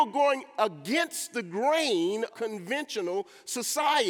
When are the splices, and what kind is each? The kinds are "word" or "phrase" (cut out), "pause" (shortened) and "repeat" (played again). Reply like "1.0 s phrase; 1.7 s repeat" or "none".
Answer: 2.3 s word